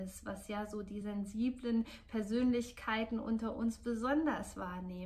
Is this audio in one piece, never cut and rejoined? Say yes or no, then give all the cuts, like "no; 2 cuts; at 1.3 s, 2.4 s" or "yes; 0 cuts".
yes; 0 cuts